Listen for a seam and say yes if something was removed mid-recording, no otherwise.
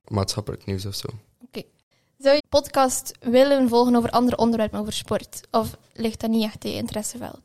yes